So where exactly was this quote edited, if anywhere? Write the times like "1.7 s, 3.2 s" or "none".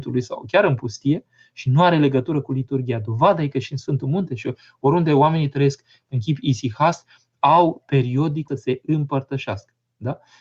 8.5 s